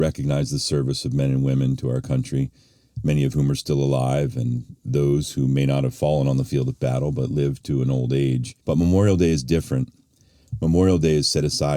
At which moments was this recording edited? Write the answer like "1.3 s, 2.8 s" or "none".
8.6 s